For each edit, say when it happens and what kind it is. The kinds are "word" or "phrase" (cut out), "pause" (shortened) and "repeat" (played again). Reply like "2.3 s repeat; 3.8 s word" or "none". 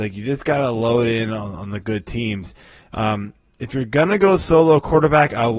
none